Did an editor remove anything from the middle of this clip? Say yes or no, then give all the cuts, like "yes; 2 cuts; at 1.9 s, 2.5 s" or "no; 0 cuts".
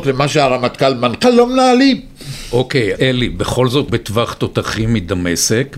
yes; 3 cuts; at 1.2 s, 2.9 s, 3.9 s